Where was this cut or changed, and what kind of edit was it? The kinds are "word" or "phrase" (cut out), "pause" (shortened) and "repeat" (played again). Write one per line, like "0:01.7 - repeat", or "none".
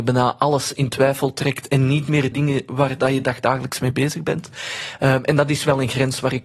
0:02.3 - phrase